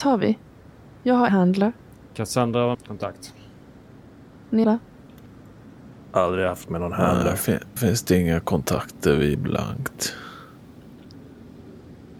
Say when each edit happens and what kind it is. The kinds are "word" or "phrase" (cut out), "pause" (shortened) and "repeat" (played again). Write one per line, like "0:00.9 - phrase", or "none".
0:01.3 - word
0:02.7 - word
0:04.6 - word
0:06.7 - word
0:07.8 - word
0:09.3 - word